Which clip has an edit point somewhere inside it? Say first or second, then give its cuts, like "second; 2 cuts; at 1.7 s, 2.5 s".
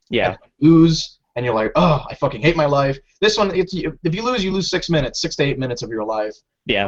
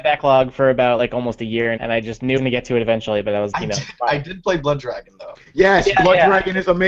second; 3 cuts; at 1.8 s, 2.4 s, 3.5 s